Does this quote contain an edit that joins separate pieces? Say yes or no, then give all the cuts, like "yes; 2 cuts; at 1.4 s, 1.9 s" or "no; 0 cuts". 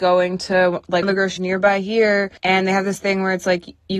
yes; 3 cuts; at 1.0 s, 1.4 s, 2.4 s